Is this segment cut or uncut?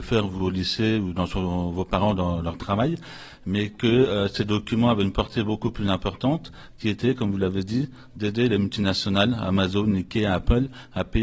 uncut